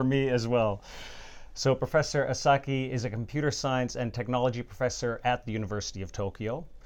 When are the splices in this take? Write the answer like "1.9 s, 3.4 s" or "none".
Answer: none